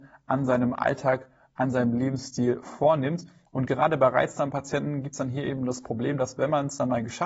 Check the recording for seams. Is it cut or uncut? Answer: uncut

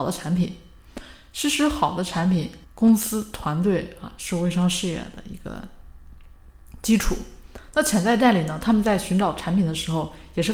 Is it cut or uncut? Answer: cut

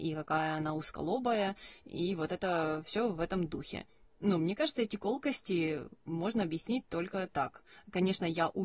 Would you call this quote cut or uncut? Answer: uncut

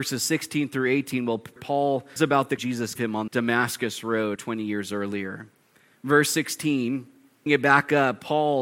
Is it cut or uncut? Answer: cut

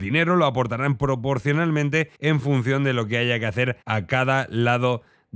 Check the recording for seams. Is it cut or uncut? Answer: cut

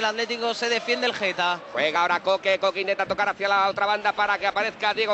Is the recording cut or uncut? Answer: uncut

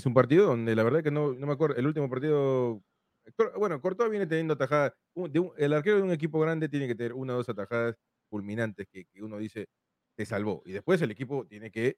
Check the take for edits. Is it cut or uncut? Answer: uncut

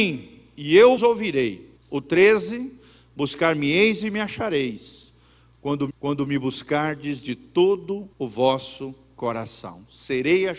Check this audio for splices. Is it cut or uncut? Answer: cut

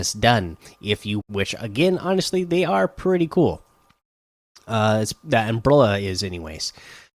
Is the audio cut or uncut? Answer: cut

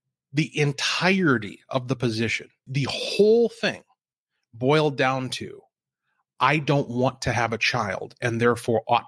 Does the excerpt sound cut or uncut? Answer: cut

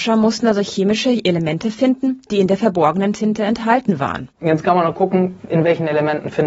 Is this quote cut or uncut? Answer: cut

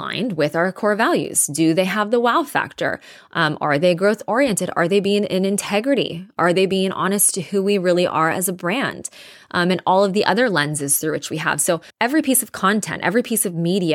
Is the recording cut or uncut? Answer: cut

